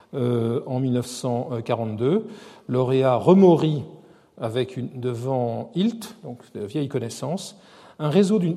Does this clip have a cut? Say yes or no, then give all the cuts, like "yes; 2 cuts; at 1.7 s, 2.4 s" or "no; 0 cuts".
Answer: no; 0 cuts